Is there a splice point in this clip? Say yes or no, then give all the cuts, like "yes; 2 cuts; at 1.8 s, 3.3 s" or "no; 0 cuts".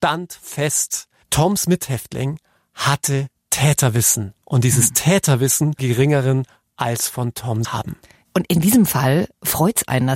yes; 2 cuts; at 5.8 s, 7.6 s